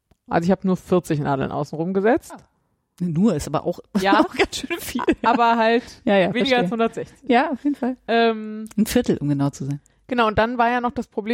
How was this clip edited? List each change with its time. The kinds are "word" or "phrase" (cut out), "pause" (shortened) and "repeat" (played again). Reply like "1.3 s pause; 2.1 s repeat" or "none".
none